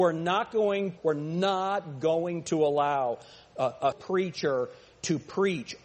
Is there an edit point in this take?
yes; 2 cuts; at 1.0 s, 3.9 s

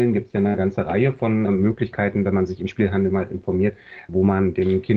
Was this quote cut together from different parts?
yes; 1 cut; at 1.5 s

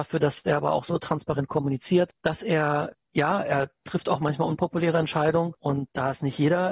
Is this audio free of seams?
yes; 0 cuts

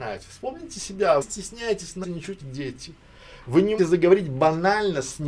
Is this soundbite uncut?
no; 4 cuts; at 1.2 s, 2.0 s, 2.4 s, 3.8 s

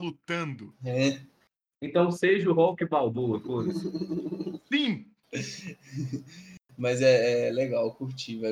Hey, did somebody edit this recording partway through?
no; 0 cuts

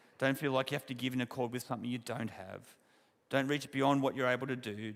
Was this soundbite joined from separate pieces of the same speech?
no; 0 cuts

